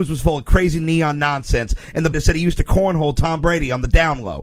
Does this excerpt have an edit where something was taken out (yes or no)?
yes